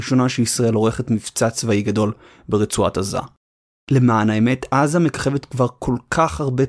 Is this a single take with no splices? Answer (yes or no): yes